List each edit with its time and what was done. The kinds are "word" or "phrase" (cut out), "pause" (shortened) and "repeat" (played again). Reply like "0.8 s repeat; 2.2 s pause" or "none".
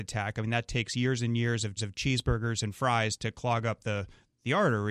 1.8 s repeat